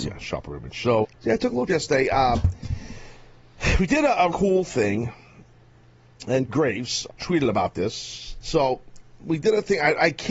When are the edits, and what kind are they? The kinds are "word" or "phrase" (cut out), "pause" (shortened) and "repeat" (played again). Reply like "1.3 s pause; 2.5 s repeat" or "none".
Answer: 1.0 s word; 1.7 s word; 4.3 s word; 6.5 s word; 7.1 s word; 9.2 s word

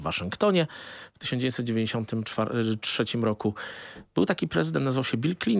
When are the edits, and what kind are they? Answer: none

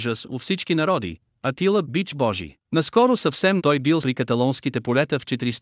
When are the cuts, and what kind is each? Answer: 1.8 s phrase; 2.6 s pause; 3.6 s word; 4.0 s word

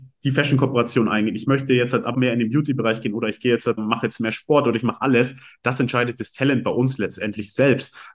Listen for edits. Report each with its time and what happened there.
2.1 s word; 3.8 s word

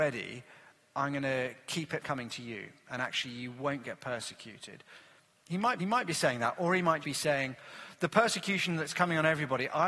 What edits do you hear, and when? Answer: 2.0 s word; 5.8 s repeat; 7.0 s word

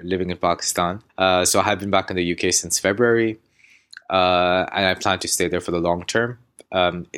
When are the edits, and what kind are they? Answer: 1.1 s pause

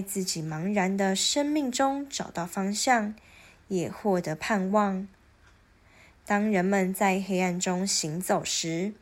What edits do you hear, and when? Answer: none

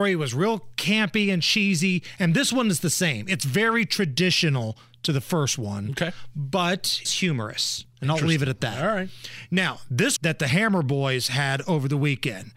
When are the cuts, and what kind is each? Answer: 7.0 s phrase; 10.2 s phrase

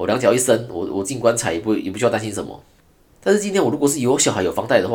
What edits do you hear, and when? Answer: none

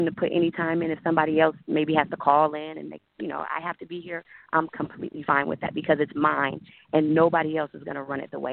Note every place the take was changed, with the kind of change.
none

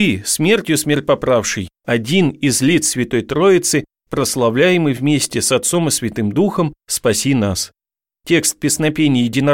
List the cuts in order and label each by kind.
none

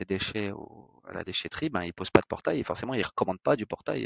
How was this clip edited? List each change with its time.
1.0 s pause

